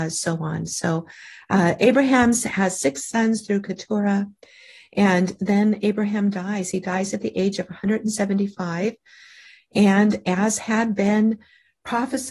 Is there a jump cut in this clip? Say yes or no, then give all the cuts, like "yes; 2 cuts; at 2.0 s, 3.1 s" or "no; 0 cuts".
no; 0 cuts